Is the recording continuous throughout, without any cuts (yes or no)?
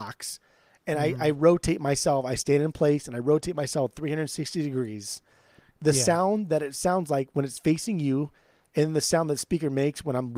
yes